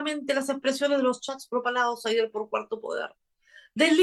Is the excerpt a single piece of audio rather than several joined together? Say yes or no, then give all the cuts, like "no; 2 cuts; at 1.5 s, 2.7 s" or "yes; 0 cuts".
yes; 0 cuts